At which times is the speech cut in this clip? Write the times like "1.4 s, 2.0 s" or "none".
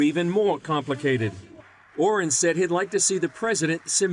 none